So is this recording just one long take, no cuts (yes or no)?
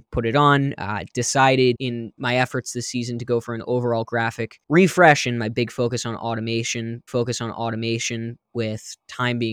no